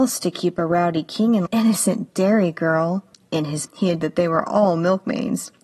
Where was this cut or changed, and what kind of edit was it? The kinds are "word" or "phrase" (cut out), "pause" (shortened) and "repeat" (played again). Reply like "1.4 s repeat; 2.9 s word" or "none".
1.5 s phrase; 3.1 s pause; 3.7 s word; 4.0 s word